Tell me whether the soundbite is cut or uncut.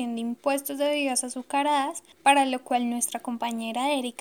cut